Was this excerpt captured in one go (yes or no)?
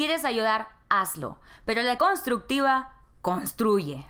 no